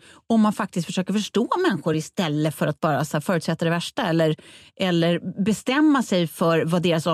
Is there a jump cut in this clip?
no; 0 cuts

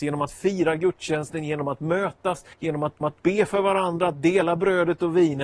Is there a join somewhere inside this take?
yes; 2 cuts; at 2.5 s, 3.0 s

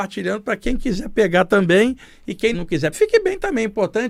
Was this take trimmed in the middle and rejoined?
yes; 2 cuts; at 2.5 s, 2.9 s

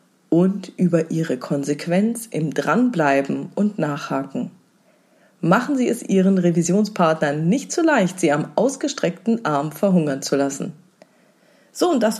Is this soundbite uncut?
yes; 0 cuts

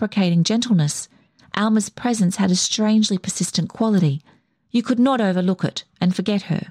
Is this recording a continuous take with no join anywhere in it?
yes; 0 cuts

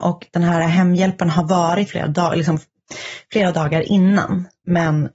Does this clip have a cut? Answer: yes; 1 cut; at 1.9 s

